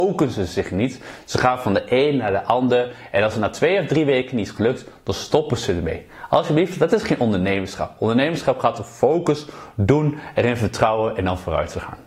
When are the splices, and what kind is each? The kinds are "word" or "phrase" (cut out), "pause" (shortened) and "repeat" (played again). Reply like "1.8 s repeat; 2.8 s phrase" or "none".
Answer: none